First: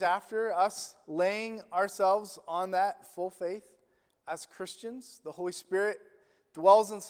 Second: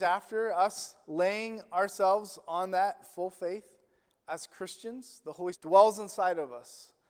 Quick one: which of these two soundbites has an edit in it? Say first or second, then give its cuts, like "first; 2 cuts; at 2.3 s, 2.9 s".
second; 1 cut; at 5.5 s